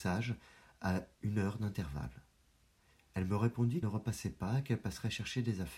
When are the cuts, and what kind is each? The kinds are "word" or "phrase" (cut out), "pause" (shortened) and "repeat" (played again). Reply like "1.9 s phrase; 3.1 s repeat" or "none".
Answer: 3.8 s word